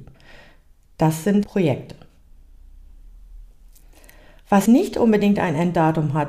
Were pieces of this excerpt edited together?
yes; 2 cuts; at 1.4 s, 4.7 s

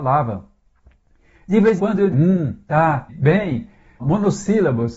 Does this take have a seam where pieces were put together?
yes; 4 cuts; at 1.8 s, 2.1 s, 3.1 s, 4.0 s

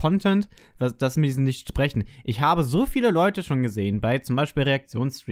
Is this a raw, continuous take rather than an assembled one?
yes; 0 cuts

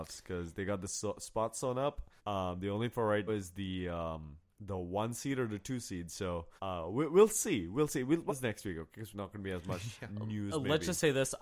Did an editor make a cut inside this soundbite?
yes; 7 cuts; at 2.2 s, 2.9 s, 3.3 s, 4.5 s, 6.6 s, 8.3 s, 9.1 s

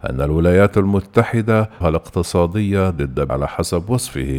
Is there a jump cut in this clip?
yes; 2 cuts; at 1.8 s, 3.3 s

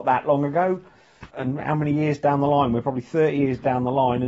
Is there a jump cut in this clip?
yes; 1 cut; at 1.3 s

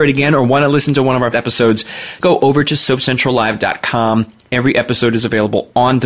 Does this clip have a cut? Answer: yes; 2 cuts; at 1.3 s, 2.2 s

